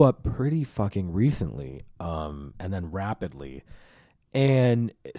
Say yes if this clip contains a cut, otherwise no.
no